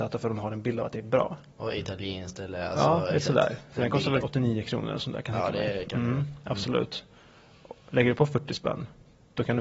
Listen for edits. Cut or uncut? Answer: cut